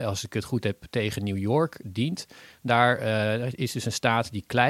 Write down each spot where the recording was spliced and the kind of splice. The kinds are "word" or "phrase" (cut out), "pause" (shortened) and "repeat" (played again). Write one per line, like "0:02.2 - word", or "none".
none